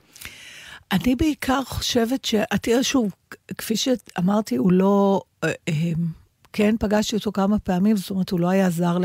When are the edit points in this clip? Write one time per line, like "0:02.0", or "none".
none